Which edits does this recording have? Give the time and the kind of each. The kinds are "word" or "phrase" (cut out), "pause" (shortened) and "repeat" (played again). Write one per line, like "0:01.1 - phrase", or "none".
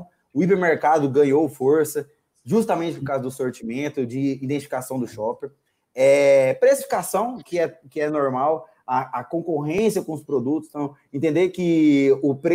none

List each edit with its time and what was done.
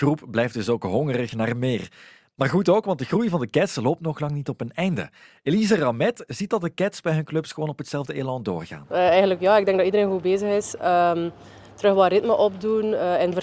none

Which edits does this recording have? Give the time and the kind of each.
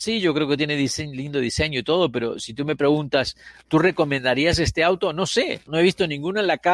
0:05.7 - word

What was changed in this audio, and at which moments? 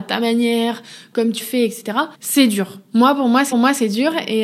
0:01.4 - word
0:02.1 - pause
0:03.5 - repeat

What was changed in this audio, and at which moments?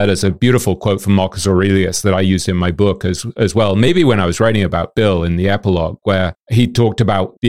none

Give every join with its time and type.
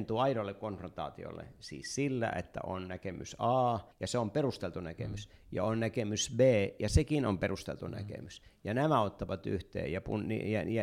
0:03.9 - pause

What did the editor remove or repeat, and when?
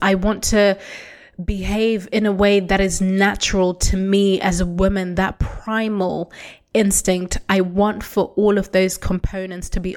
none

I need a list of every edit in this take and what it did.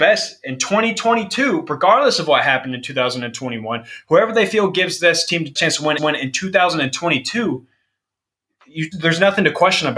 0:05.6 - phrase
0:06.0 - repeat
0:08.9 - word

